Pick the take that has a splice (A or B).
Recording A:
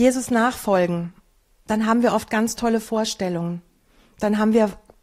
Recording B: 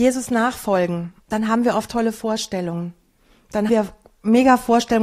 B